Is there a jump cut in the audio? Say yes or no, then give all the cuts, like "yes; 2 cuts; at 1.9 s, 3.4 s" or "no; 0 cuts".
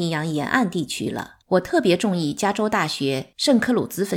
yes; 1 cut; at 1.4 s